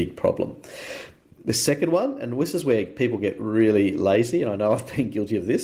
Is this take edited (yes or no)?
no